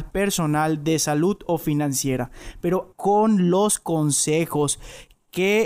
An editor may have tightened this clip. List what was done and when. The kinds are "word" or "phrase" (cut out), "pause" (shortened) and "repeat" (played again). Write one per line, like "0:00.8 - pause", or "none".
0:02.9 - phrase